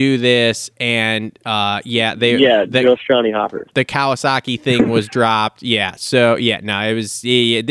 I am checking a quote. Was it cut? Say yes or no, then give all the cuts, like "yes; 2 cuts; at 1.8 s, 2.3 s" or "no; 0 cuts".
no; 0 cuts